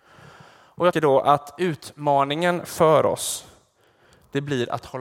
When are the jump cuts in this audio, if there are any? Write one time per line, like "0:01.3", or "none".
0:00.9